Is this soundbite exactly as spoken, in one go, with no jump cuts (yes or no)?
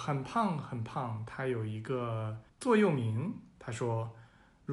no